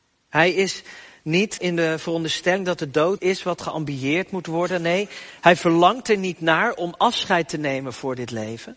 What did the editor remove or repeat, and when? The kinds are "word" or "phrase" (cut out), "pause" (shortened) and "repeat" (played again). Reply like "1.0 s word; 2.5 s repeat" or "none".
1.6 s word; 3.2 s word